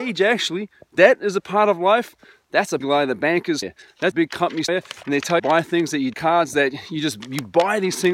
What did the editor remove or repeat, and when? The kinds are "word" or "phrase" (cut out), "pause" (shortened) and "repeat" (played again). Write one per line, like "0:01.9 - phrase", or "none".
0:02.8 - word
0:03.6 - word
0:04.1 - phrase
0:04.7 - word
0:05.4 - phrase
0:06.1 - phrase